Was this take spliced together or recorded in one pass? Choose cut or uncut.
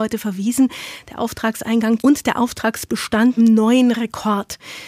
cut